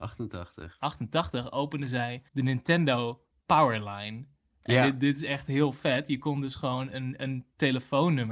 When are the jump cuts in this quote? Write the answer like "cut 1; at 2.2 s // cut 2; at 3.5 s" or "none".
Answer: cut 1; at 2.3 s